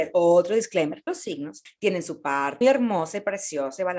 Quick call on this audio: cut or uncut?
cut